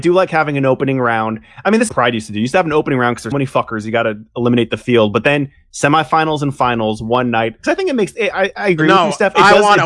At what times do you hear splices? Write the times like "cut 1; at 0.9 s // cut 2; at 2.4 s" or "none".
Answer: cut 1; at 1.9 s // cut 2; at 3.3 s

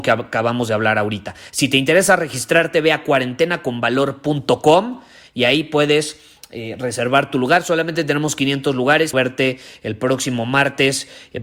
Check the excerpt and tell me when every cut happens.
cut 1; at 9.1 s

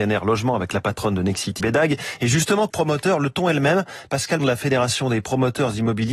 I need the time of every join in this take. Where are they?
cut 1; at 1.6 s // cut 2; at 2.7 s // cut 3; at 4.4 s

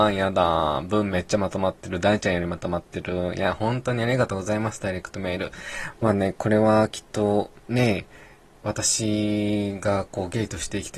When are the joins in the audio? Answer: cut 1; at 7.6 s

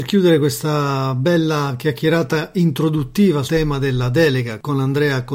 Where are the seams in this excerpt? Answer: cut 1; at 3.5 s

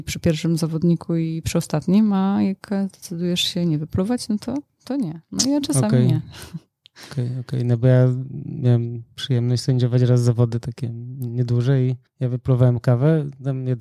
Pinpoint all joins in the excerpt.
cut 1; at 12.1 s

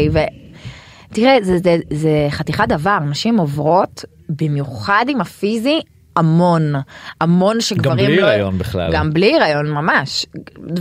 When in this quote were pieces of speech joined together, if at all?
none

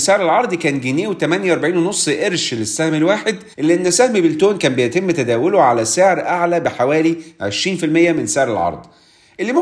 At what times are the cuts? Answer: cut 1; at 3.5 s

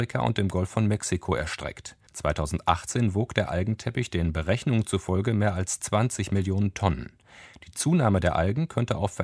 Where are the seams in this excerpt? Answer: cut 1; at 2.1 s

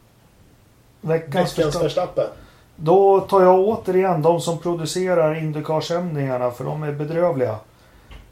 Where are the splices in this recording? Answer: none

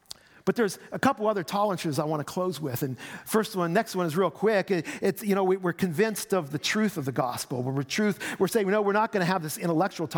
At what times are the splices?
none

